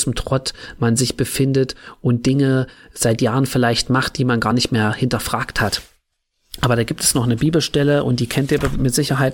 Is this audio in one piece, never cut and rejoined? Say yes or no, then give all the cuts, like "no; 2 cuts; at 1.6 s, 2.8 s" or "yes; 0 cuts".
yes; 0 cuts